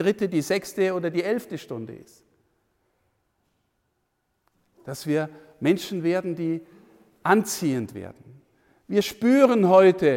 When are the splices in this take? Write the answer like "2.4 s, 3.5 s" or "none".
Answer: none